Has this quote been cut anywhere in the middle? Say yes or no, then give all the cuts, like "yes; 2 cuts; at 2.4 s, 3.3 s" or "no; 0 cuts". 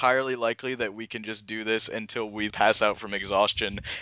yes; 1 cut; at 2.5 s